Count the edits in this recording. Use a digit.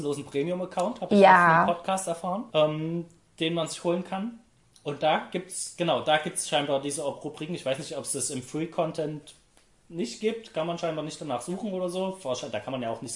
1